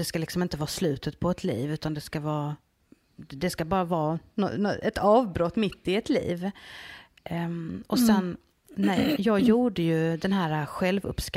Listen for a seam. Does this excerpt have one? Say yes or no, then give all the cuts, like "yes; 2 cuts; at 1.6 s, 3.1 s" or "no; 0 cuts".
no; 0 cuts